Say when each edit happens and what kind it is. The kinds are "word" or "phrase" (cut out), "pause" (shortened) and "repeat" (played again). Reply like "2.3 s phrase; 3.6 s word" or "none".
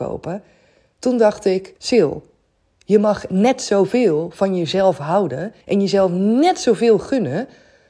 1.8 s pause; 5.6 s pause